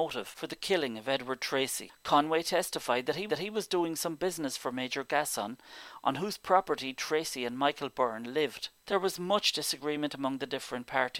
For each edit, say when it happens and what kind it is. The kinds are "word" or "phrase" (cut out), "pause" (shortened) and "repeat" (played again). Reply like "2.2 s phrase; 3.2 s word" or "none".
3.3 s repeat